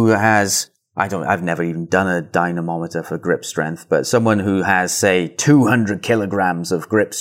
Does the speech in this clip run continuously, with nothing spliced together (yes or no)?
yes